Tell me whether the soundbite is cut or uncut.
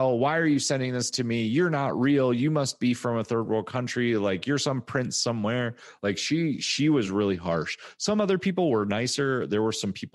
uncut